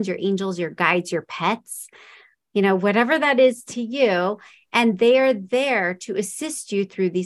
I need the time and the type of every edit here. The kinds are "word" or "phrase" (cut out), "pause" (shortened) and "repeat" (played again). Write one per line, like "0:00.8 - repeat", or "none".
none